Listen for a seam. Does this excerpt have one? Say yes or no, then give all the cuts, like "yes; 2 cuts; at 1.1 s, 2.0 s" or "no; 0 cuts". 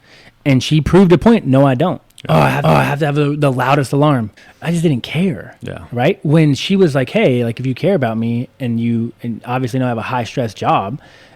yes; 2 cuts; at 2.6 s, 4.4 s